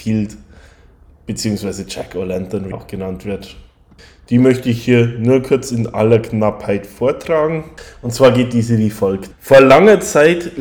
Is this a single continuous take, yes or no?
no